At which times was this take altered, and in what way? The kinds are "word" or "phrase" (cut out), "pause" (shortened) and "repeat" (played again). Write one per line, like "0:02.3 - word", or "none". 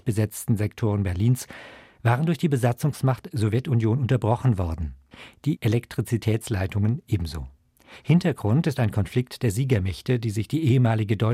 none

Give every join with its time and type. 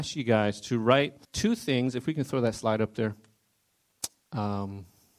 0:01.2 - pause

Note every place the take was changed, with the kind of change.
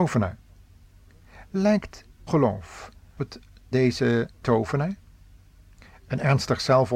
0:02.3 - word
0:03.2 - word
0:03.7 - word
0:04.4 - word

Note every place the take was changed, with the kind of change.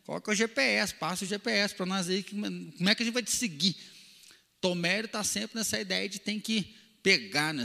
none

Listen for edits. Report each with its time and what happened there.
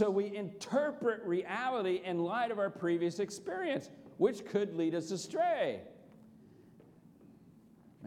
none

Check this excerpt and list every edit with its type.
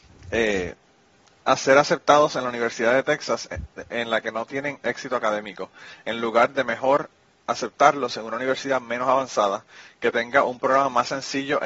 none

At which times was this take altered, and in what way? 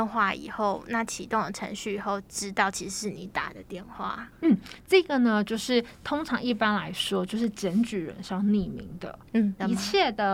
0:04.3 - pause

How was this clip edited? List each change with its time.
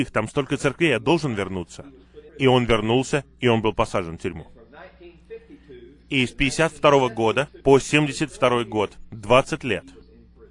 0:02.3 - pause
0:07.6 - pause

